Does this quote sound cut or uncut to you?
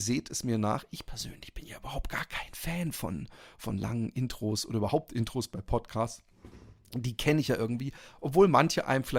uncut